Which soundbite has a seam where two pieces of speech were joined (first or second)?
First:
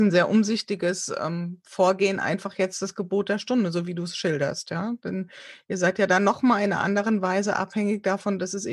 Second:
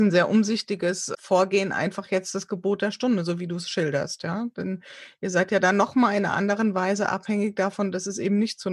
second